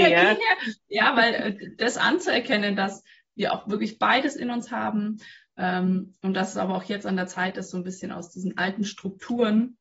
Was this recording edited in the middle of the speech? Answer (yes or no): no